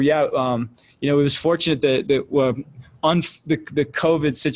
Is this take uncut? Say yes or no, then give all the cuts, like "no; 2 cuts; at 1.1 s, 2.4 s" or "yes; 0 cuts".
yes; 0 cuts